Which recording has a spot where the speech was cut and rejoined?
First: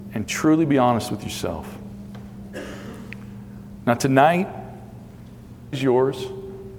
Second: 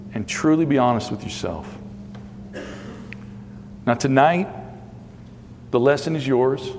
first; 1 cut; at 5.7 s

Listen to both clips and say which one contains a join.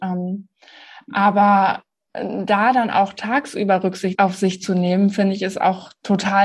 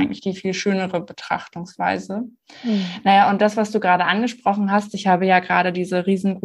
first; 1 cut; at 4.1 s

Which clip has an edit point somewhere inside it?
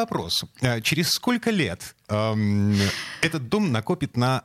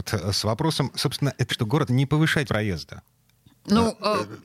second; 4 cuts; at 0.9 s, 1.5 s, 1.9 s, 2.5 s

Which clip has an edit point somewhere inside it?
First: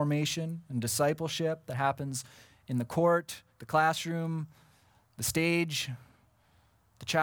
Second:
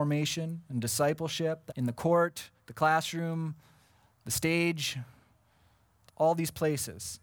second; 2 cuts; at 1.7 s, 6.1 s

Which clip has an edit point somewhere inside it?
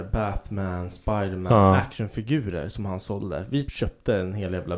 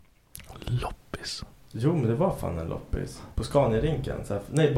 first; 1 cut; at 3.7 s

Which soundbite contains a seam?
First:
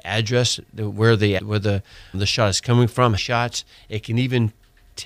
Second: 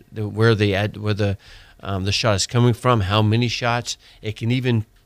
first; 3 cuts; at 1.4 s, 2.1 s, 3.2 s

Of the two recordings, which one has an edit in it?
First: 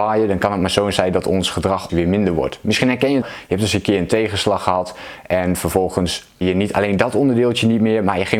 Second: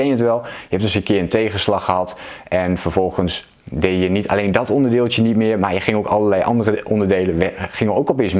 first; 3 cuts; at 1.9 s, 3.2 s, 6.4 s

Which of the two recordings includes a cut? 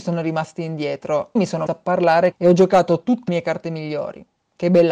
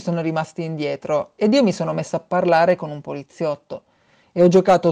first; 4 cuts; at 1.4 s, 1.7 s, 2.3 s, 3.3 s

